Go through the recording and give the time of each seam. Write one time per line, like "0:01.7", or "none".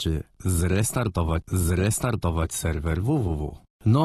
0:01.4